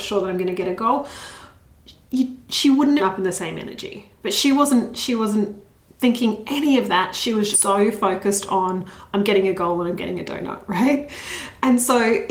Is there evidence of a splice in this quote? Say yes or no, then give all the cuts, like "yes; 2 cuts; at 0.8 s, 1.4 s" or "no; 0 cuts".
yes; 3 cuts; at 3.0 s, 5.7 s, 7.5 s